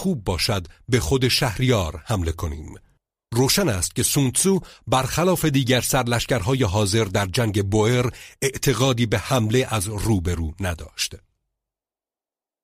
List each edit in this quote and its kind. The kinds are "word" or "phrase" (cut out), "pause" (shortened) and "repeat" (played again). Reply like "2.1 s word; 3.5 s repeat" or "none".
3.0 s pause